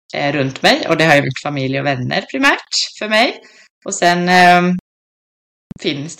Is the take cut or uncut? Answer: uncut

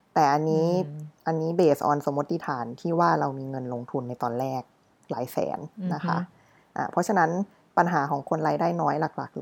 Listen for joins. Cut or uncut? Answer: uncut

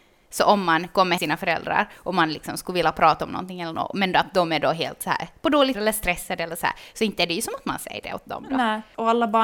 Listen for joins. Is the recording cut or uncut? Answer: cut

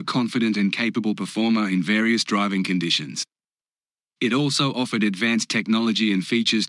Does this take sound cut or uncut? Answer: uncut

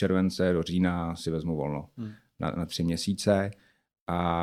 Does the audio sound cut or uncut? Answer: uncut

